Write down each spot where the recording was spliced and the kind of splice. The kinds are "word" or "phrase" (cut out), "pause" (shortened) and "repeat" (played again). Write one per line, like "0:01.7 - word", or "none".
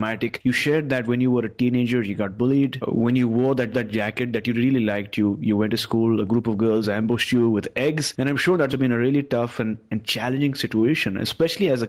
0:03.7 - repeat
0:08.7 - word